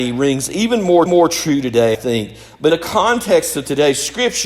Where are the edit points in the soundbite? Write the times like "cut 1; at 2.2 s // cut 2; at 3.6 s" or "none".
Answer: cut 1; at 1.1 s // cut 2; at 1.9 s // cut 3; at 2.7 s